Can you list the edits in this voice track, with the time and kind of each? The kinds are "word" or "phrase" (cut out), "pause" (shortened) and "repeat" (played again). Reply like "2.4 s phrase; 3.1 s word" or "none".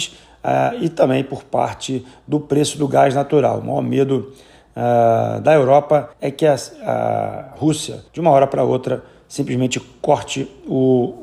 6.1 s pause; 8.1 s pause